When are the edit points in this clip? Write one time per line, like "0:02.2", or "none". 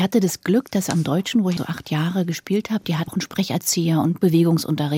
0:01.6
0:03.1

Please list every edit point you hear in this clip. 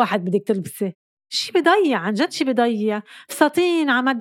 none

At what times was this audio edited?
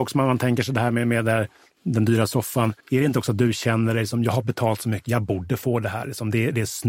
0:02.8

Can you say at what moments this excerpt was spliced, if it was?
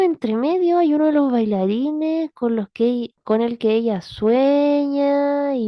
none

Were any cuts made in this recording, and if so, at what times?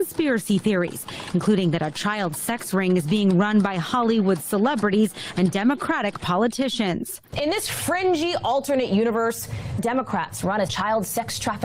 0:09.8
0:10.7

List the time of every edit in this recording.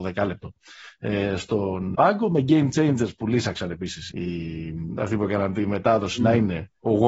0:01.9
0:04.1

